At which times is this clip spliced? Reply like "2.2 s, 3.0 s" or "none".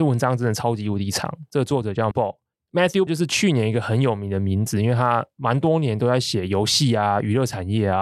2.1 s, 3.1 s